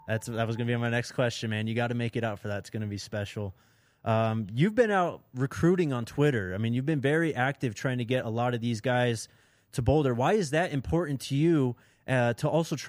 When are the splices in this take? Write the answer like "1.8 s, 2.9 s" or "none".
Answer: none